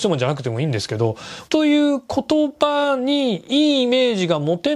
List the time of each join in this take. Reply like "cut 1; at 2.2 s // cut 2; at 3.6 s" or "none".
cut 1; at 1.5 s